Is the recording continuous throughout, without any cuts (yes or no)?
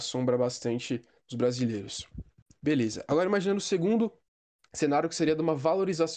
no